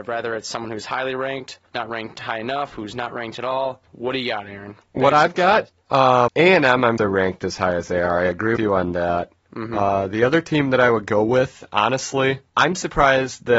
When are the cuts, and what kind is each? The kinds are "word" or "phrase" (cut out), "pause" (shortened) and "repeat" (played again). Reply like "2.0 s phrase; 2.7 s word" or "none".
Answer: 1.7 s pause; 3.9 s pause; 4.8 s pause; 6.3 s word; 7.0 s word; 8.6 s word; 12.5 s pause